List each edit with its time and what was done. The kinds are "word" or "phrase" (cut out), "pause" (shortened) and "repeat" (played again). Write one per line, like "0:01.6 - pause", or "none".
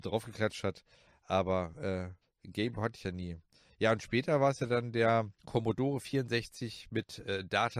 0:02.2 - pause
0:05.4 - pause